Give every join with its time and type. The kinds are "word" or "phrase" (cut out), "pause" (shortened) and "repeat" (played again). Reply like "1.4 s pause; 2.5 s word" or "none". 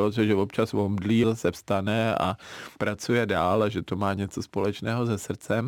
1.2 s word; 2.8 s pause